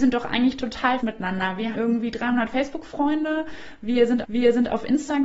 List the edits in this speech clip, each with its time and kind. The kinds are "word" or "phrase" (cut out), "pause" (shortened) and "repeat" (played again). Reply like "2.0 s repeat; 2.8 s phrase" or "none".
1.0 s word; 1.7 s word; 4.2 s repeat